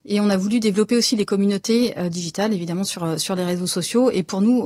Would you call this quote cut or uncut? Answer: uncut